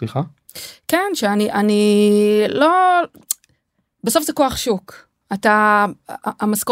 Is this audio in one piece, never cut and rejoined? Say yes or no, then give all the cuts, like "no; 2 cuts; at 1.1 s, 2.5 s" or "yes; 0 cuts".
yes; 0 cuts